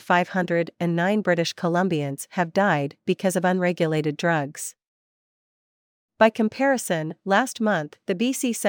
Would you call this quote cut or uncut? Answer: uncut